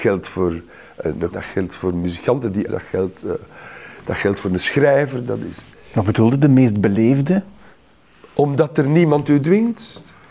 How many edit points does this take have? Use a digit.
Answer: 2